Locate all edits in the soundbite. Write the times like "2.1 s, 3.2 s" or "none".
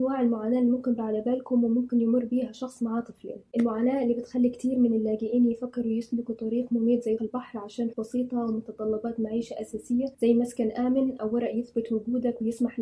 1.0 s, 7.2 s, 7.9 s, 10.1 s